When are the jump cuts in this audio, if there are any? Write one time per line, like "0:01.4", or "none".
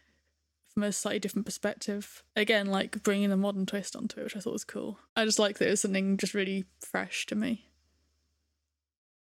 0:02.3
0:05.1